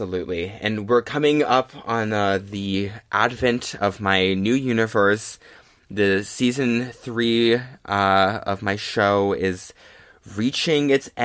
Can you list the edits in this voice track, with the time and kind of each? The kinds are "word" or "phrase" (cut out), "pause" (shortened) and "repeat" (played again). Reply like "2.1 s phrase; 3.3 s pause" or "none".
none